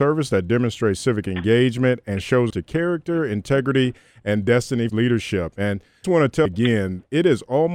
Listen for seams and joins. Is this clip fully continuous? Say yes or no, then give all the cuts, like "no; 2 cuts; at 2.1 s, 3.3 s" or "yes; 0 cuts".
no; 4 cuts; at 2.5 s, 4.9 s, 6.0 s, 6.5 s